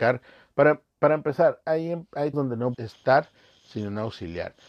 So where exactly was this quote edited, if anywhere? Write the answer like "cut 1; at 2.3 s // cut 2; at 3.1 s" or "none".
cut 1; at 1.6 s // cut 2; at 2.3 s // cut 3; at 2.7 s